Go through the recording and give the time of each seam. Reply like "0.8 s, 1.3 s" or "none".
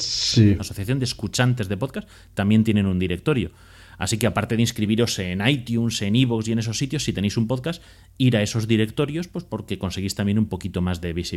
none